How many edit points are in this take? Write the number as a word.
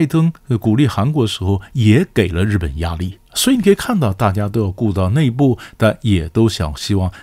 one